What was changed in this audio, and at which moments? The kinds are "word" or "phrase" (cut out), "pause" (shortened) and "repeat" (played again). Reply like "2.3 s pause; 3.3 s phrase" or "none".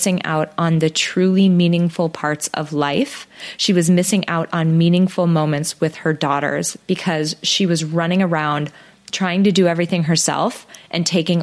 none